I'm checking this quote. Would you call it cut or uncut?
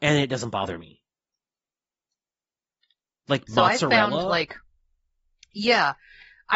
uncut